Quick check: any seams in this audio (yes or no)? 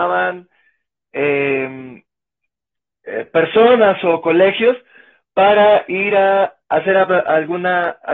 no